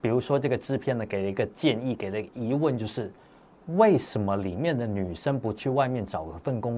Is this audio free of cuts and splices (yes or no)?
yes